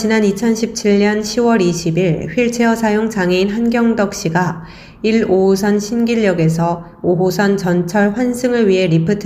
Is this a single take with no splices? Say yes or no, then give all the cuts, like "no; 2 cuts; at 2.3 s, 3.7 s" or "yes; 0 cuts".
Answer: yes; 0 cuts